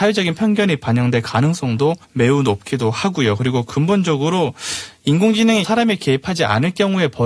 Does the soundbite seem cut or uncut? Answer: cut